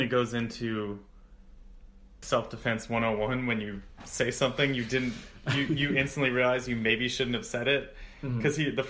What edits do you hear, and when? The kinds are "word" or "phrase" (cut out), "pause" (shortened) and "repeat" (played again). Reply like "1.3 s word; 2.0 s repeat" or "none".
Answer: 2.2 s word